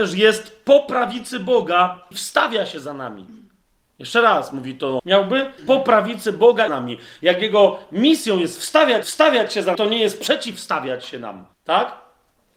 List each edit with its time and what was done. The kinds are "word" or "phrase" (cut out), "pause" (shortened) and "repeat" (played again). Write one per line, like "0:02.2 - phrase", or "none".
0:02.1 - word
0:03.6 - pause
0:05.0 - word
0:05.6 - word
0:06.7 - phrase
0:09.0 - repeat
0:09.7 - word
0:11.5 - pause